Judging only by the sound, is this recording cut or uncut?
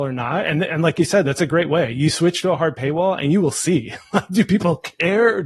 uncut